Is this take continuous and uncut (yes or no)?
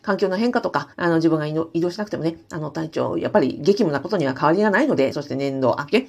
no